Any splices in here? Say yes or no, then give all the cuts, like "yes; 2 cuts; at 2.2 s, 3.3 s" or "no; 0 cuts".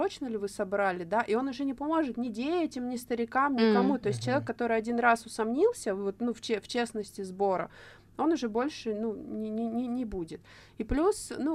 no; 0 cuts